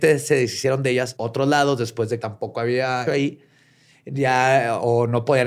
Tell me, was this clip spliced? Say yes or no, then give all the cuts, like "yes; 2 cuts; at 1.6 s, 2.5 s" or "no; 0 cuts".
yes; 3 cuts; at 1.2 s, 2.2 s, 3.1 s